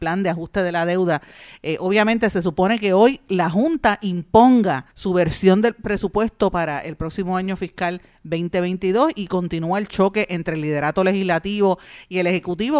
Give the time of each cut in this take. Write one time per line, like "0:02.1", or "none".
0:04.9

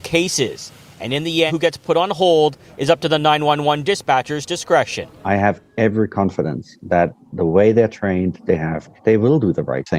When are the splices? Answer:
0:01.5
0:08.5
0:09.0

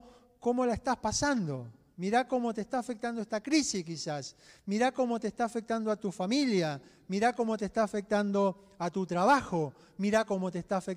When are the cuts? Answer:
none

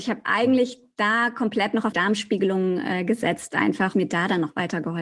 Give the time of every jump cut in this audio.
0:01.9
0:03.9

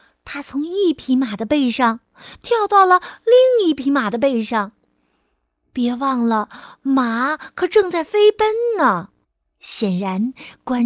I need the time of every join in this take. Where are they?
0:09.2

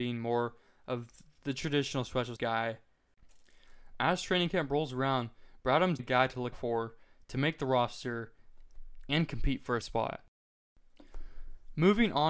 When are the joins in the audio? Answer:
0:02.4
0:06.0
0:06.5
0:09.8

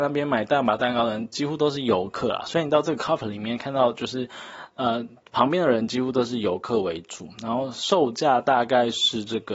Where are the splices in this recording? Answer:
0:03.2

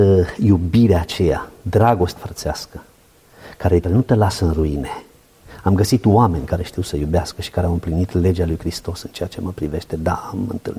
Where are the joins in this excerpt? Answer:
0:02.2
0:03.8

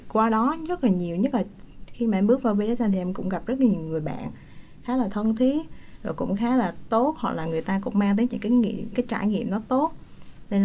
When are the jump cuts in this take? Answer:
0:08.3
0:08.9

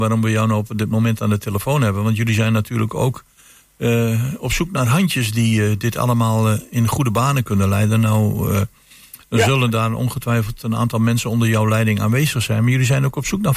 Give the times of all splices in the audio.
none

